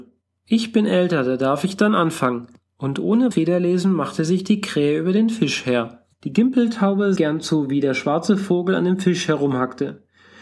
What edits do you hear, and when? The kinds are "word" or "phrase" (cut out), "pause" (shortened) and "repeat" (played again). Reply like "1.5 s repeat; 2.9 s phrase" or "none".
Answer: 3.3 s word; 6.1 s pause; 7.2 s phrase